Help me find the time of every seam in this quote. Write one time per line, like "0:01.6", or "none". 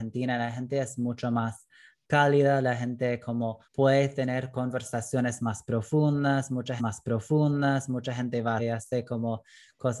0:03.6
0:06.8
0:08.6

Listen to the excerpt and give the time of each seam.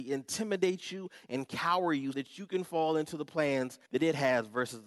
0:02.1
0:03.9

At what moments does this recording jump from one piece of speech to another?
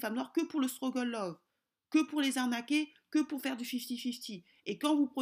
none

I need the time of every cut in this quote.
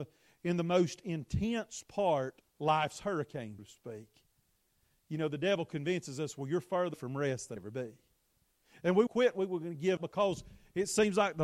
0:02.4
0:03.6
0:06.9
0:07.6
0:09.1
0:10.0

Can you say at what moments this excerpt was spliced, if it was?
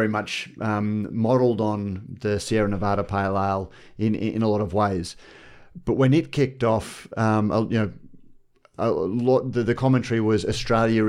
none

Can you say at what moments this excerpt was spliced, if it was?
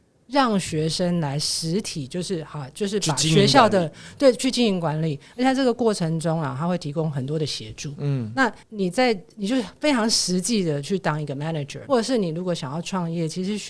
0:08.6
0:09.3
0:11.9

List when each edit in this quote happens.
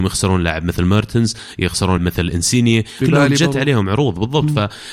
0:02.0
0:03.0

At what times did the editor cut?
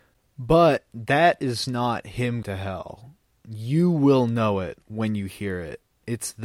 0:02.4

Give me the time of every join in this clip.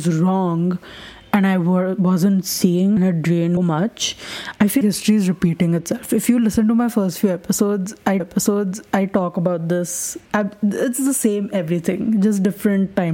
0:03.0
0:03.6
0:04.8
0:08.2
0:10.3

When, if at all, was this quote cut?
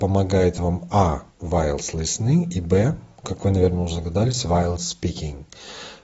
0:01.3

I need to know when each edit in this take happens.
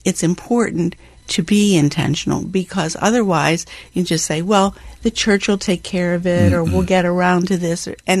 none

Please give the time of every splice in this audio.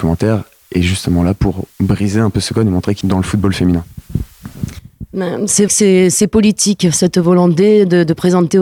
0:01.7
0:03.0
0:05.7

